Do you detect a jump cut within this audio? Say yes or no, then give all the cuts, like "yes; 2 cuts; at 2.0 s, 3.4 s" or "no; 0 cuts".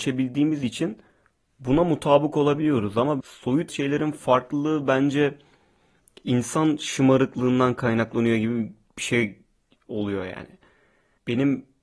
yes; 2 cuts; at 3.2 s, 3.7 s